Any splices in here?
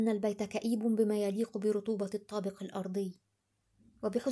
no; 0 cuts

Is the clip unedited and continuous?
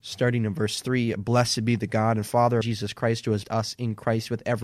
no; 2 cuts; at 2.6 s, 3.4 s

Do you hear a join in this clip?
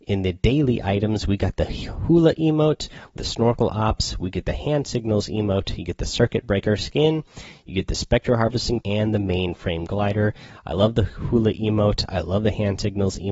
yes; 2 cuts; at 3.2 s, 8.8 s

